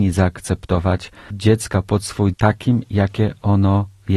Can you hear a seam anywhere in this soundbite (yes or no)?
yes